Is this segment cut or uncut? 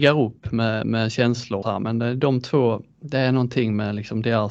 cut